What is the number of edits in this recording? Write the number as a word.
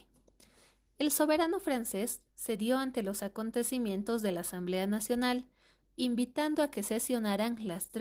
zero